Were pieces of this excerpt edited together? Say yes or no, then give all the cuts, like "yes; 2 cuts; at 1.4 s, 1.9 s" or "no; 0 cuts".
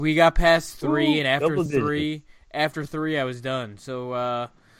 no; 0 cuts